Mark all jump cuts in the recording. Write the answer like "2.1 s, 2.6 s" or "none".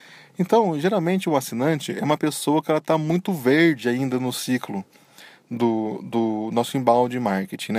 none